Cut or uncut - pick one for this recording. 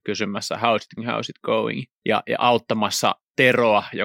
cut